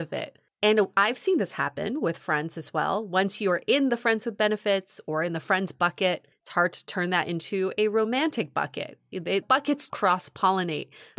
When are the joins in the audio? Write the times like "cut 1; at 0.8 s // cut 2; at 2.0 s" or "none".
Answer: cut 1; at 9.4 s // cut 2; at 9.9 s